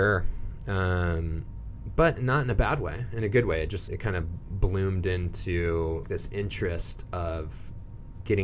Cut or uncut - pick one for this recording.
cut